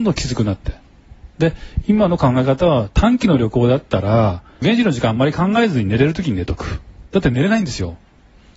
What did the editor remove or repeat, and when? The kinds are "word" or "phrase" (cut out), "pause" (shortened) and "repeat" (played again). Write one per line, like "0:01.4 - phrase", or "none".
0:07.1 - pause